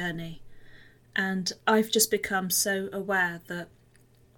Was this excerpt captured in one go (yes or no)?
yes